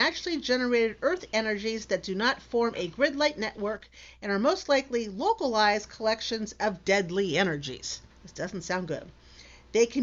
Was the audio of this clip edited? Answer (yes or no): yes